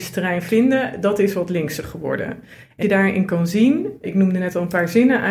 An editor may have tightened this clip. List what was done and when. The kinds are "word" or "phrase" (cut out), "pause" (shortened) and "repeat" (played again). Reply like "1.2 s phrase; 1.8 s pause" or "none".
2.8 s phrase; 4.0 s word

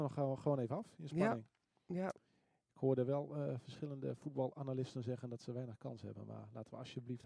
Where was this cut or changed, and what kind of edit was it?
none

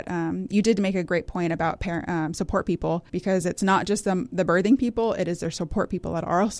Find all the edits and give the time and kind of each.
3.1 s pause

